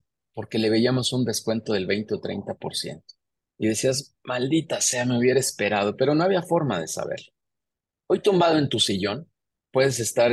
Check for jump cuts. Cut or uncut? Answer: uncut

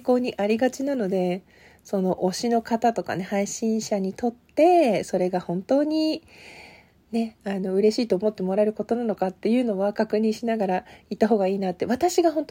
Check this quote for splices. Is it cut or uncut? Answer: uncut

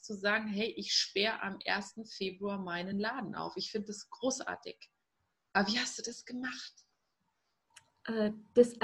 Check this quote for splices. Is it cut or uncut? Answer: uncut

